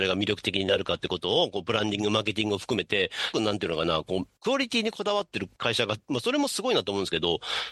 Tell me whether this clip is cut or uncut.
cut